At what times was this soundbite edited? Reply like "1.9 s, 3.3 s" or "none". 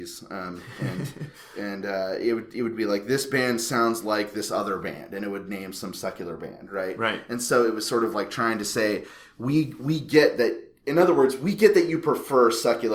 none